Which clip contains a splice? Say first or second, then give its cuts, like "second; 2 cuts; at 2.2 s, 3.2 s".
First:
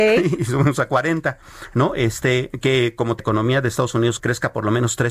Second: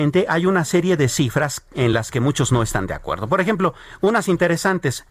first; 2 cuts; at 3.2 s, 4.2 s